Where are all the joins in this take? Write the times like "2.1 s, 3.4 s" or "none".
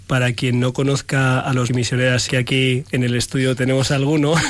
1.7 s, 2.3 s